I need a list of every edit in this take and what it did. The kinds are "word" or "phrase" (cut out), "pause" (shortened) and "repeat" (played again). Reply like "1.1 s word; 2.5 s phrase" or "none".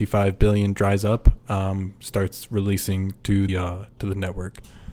3.5 s word